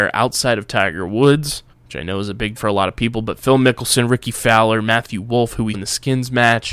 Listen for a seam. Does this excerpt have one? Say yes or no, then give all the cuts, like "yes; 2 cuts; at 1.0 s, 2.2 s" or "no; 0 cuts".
yes; 3 cuts; at 1.7 s, 2.6 s, 5.7 s